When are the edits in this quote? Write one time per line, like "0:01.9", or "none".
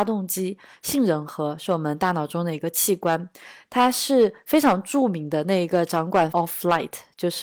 0:06.3